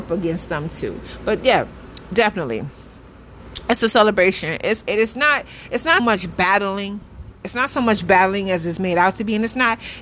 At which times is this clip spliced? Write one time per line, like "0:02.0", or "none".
0:04.8
0:06.0